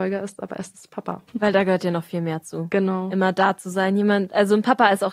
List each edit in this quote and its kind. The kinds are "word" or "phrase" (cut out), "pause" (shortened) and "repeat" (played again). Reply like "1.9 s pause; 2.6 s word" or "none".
1.3 s pause